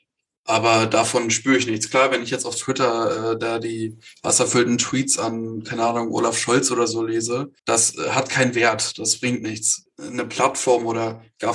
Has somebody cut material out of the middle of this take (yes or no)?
yes